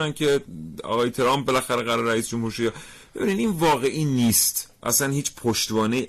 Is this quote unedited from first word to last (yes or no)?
yes